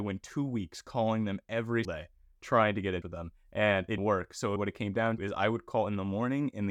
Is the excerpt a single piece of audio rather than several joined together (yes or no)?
no